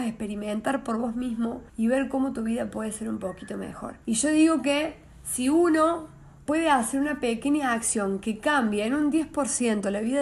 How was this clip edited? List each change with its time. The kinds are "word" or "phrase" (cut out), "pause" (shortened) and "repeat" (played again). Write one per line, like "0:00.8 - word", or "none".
0:01.7 - pause
0:04.0 - pause
0:06.5 - word